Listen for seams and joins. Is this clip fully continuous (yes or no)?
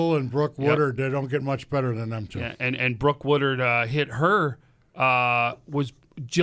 yes